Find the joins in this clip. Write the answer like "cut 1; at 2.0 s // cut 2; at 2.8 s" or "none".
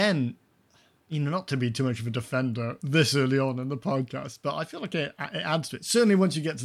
none